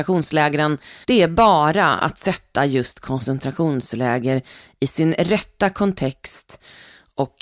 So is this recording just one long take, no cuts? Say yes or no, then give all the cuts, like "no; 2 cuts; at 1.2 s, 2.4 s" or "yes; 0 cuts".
no; 1 cut; at 1.0 s